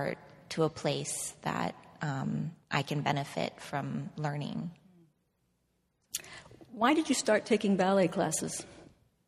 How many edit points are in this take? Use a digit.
1